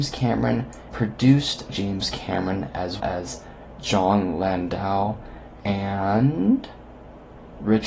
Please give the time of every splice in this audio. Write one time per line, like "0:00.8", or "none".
0:00.9
0:01.7
0:03.0